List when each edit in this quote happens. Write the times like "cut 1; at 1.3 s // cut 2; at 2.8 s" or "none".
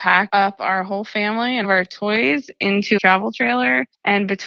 cut 1; at 1.6 s // cut 2; at 3.0 s